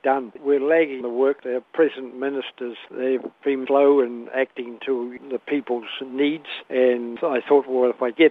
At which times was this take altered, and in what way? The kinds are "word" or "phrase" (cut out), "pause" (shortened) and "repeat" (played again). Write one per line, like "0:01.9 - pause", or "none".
0:01.0 - word
0:03.7 - word